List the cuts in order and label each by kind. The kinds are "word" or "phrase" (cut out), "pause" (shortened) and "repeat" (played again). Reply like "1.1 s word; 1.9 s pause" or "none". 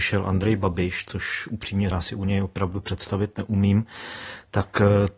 1.9 s word